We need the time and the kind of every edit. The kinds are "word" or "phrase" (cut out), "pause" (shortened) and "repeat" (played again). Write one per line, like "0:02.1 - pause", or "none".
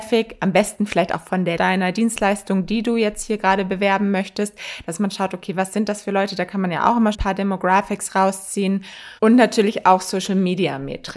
0:01.6 - phrase
0:07.1 - word
0:09.2 - pause